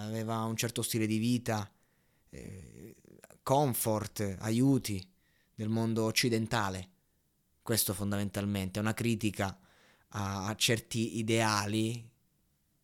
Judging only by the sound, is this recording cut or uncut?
uncut